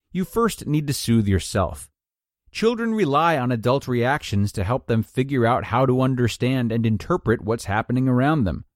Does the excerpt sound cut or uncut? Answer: uncut